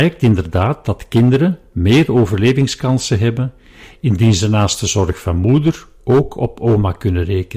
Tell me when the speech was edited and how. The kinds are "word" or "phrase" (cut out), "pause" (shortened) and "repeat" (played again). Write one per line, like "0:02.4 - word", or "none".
none

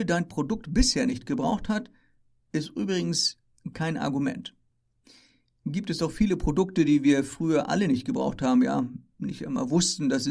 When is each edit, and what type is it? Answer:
none

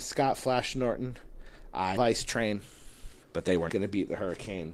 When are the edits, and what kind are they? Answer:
0:02.0 - word
0:03.2 - pause
0:03.7 - word

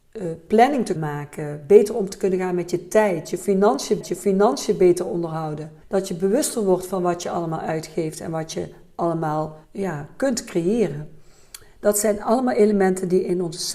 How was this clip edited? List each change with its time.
0:01.0 - word
0:04.0 - repeat
0:05.8 - pause
0:09.6 - pause

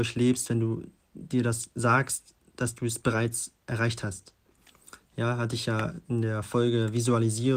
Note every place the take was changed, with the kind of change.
none

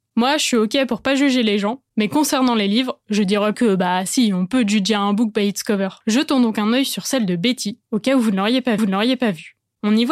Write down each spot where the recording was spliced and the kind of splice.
0:03.5 - word
0:06.0 - pause
0:08.8 - repeat

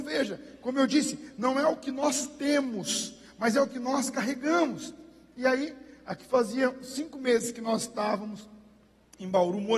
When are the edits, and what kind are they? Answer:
none

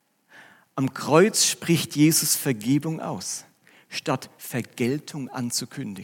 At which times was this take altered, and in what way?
none

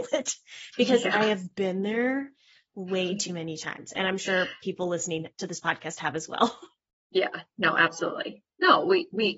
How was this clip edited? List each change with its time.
0:05.3 - pause

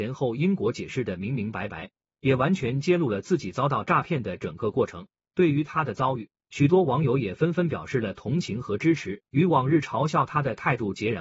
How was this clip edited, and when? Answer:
0:09.3 - pause

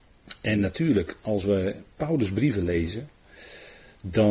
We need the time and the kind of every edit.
none

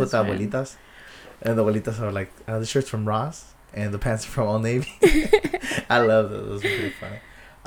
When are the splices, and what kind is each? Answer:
none

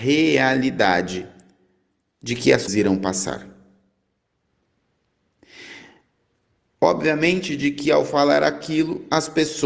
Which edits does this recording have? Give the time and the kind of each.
0:02.7 - word

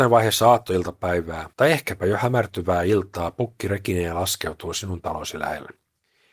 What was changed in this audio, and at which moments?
0:01.5 - pause

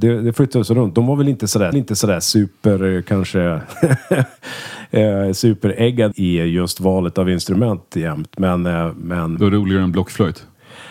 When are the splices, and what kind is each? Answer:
0:01.7 - repeat
0:06.1 - word
0:09.4 - word

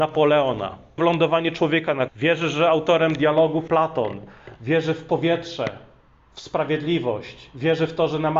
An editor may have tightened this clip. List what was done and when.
0:01.0 - word
0:02.1 - word
0:03.7 - word

